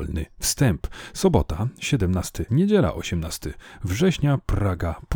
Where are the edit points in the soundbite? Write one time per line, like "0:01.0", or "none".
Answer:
0:02.5

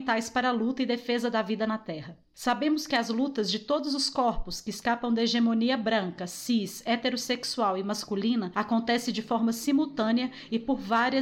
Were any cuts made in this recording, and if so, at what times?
none

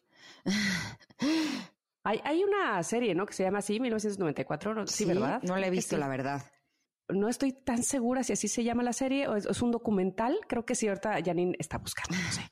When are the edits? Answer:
none

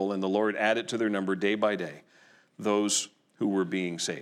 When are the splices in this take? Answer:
none

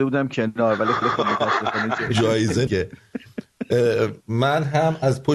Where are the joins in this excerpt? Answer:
0:01.0
0:02.7
0:04.2

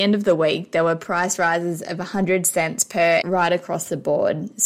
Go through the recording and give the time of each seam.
0:03.2

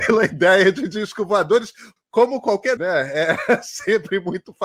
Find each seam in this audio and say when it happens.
0:02.0
0:02.8

